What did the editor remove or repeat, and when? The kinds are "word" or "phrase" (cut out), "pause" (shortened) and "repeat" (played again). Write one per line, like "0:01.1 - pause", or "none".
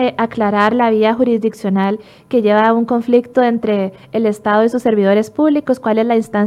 none